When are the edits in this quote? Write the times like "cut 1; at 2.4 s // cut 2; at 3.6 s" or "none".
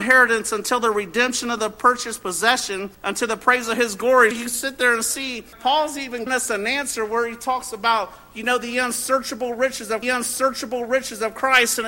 cut 1; at 2.9 s // cut 2; at 4.3 s // cut 3; at 5.5 s // cut 4; at 6.3 s // cut 5; at 10.0 s